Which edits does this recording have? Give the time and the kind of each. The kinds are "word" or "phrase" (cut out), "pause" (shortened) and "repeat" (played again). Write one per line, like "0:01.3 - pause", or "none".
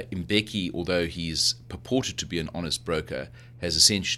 none